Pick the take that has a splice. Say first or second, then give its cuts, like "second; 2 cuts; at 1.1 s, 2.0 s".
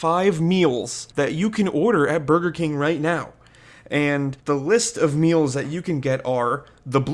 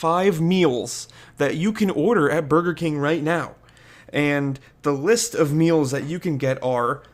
first; 2 cuts; at 1.1 s, 4.4 s